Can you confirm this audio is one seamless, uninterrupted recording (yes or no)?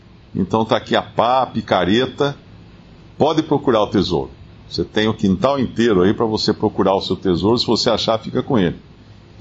yes